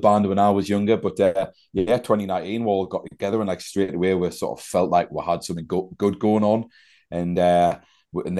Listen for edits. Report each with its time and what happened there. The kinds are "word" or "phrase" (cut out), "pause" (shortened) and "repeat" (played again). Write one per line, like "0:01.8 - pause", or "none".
none